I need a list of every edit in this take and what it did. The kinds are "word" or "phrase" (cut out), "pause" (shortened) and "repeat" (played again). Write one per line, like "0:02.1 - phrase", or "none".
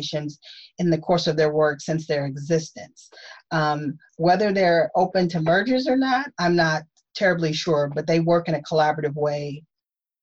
0:06.3 - word